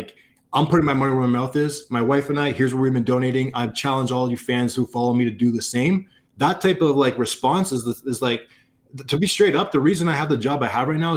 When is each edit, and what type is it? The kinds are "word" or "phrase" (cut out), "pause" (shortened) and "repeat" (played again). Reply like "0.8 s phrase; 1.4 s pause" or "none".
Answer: 6.2 s pause